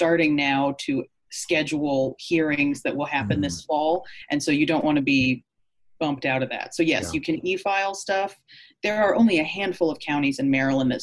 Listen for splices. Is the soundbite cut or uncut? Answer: uncut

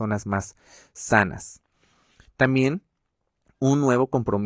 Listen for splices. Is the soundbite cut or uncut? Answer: uncut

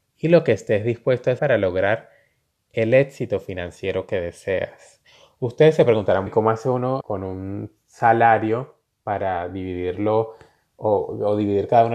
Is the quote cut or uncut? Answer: cut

